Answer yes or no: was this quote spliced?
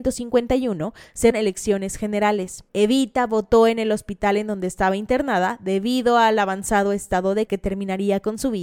yes